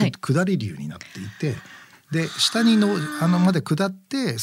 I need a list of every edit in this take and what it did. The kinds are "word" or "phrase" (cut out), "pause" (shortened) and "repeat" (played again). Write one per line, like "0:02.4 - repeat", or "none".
none